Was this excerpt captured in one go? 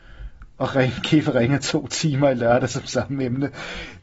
yes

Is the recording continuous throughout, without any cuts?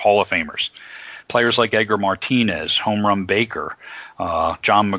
yes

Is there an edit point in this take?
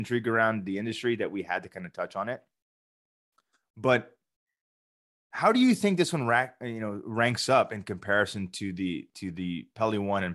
no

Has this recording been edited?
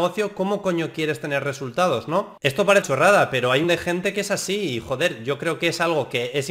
yes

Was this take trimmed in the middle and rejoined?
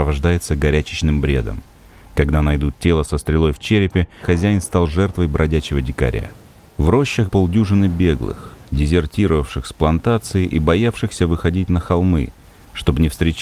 yes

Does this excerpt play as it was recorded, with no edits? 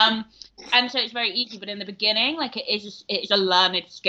yes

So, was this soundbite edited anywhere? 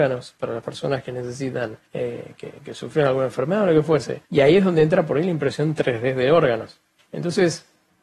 yes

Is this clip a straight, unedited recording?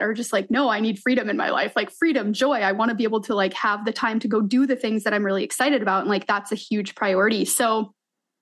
yes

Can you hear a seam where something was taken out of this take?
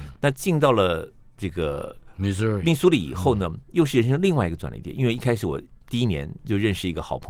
no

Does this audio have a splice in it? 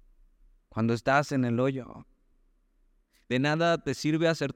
no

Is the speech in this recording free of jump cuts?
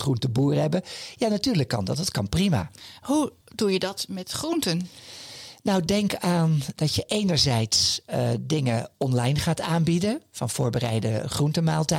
yes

